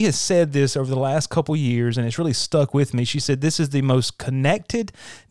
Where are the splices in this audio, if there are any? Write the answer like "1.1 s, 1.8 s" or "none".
none

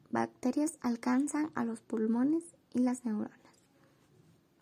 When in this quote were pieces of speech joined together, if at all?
none

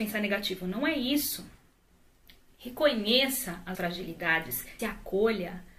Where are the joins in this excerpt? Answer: 3.7 s, 4.8 s

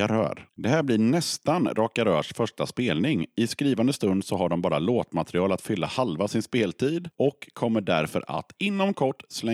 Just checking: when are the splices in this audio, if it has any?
none

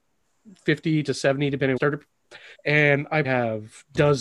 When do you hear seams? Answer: 1.8 s, 2.5 s, 3.2 s

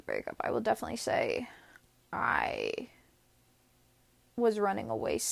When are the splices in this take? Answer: none

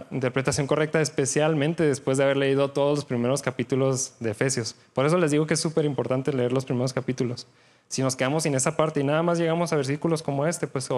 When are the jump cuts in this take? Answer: none

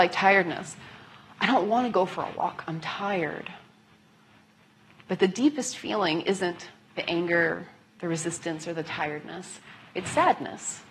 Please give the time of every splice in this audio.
none

